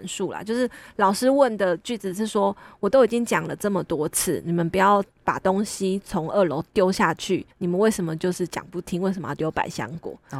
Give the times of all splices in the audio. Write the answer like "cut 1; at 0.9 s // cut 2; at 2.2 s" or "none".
cut 1; at 7.5 s